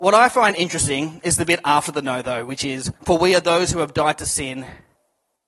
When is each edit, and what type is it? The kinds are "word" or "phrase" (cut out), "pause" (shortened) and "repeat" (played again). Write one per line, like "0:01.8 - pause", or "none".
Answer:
0:03.0 - pause